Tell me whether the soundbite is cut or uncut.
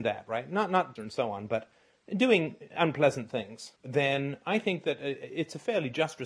cut